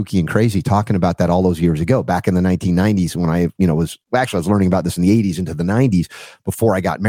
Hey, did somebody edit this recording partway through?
no; 0 cuts

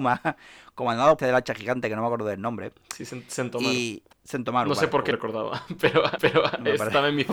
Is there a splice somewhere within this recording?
yes; 4 cuts; at 1.2 s, 4.1 s, 5.1 s, 6.2 s

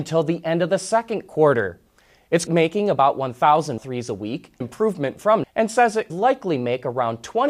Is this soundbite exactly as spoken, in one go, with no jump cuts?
no; 5 cuts; at 2.5 s, 3.8 s, 4.6 s, 5.4 s, 6.1 s

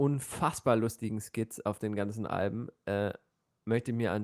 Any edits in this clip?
no; 0 cuts

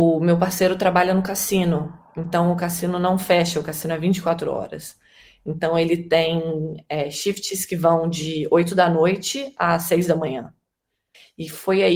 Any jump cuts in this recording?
no; 0 cuts

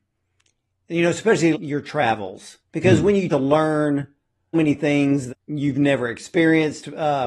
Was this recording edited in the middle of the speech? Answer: yes; 5 cuts; at 1.5 s, 2.6 s, 3.3 s, 4.5 s, 5.3 s

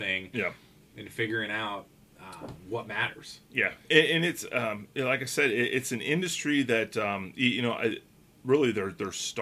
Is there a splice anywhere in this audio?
no; 0 cuts

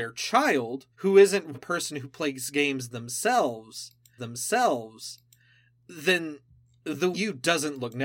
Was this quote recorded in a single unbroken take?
no; 4 cuts; at 0.9 s, 1.5 s, 4.2 s, 7.1 s

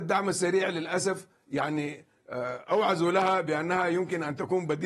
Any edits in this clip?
no; 0 cuts

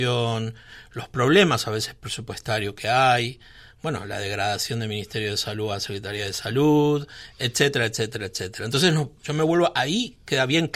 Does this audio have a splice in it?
yes; 1 cut; at 9.2 s

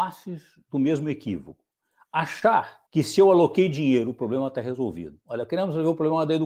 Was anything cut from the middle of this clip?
yes; 1 cut; at 2.9 s

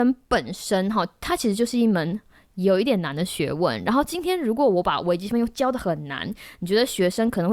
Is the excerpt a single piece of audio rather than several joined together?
yes; 0 cuts

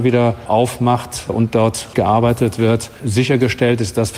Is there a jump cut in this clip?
yes; 3 cuts; at 1.3 s, 1.9 s, 3.0 s

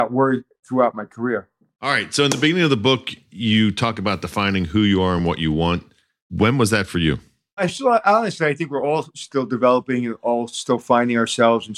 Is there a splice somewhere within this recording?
no; 0 cuts

